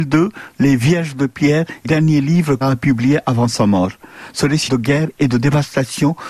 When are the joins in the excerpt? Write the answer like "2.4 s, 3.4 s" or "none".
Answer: 1.8 s, 2.6 s, 4.7 s